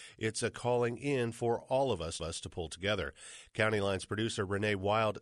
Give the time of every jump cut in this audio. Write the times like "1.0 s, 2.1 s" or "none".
2.2 s